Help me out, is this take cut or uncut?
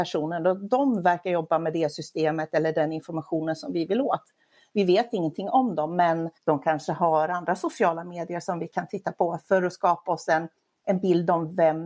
cut